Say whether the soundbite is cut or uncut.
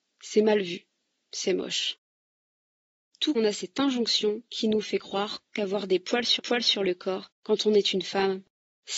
cut